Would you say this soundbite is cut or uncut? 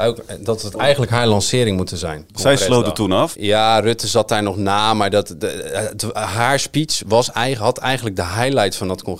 uncut